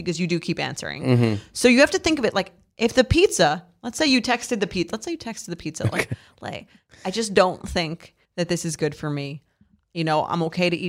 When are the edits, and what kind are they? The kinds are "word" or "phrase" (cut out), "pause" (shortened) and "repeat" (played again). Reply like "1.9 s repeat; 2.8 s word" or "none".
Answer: 8.2 s pause